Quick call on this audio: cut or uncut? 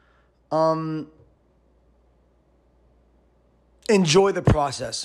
uncut